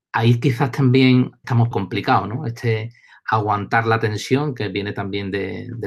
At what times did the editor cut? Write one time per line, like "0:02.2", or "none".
0:01.7